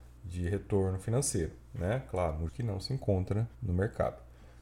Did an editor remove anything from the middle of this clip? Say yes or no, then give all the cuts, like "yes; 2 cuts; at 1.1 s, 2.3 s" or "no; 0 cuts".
yes; 2 cuts; at 2.5 s, 3.5 s